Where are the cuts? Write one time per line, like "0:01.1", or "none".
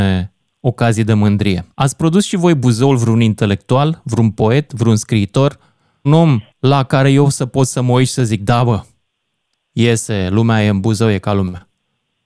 0:01.7
0:06.1
0:06.5